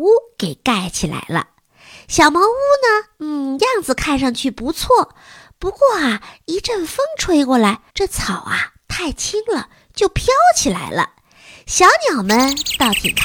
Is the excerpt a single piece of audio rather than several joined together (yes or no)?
no